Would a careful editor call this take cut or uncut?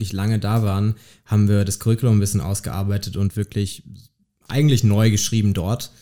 uncut